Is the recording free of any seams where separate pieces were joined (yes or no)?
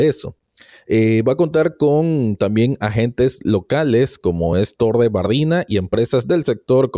yes